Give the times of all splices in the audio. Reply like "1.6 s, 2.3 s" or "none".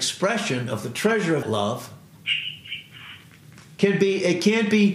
1.4 s